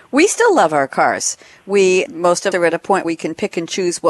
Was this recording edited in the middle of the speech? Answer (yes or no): yes